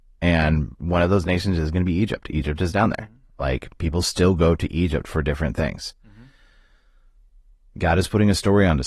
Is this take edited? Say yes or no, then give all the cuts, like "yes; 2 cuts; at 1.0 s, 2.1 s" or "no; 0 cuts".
no; 0 cuts